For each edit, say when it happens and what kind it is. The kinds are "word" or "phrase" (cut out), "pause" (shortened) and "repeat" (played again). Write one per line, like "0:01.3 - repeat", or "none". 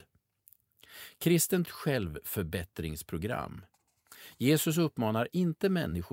0:01.6 - phrase